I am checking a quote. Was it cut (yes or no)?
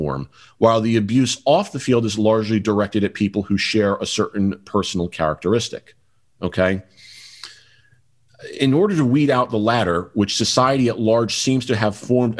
no